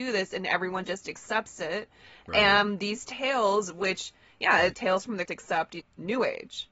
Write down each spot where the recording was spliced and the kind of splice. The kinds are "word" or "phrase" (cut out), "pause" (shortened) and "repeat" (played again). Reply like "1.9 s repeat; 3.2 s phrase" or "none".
4.7 s word; 5.3 s word; 5.8 s word